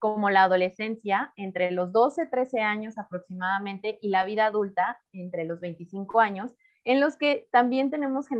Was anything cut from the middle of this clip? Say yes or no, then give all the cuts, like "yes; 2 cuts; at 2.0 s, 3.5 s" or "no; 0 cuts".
no; 0 cuts